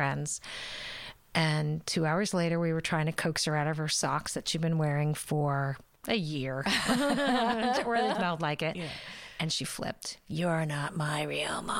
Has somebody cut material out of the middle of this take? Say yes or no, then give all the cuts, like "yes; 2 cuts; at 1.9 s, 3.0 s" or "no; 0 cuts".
yes; 1 cut; at 8.1 s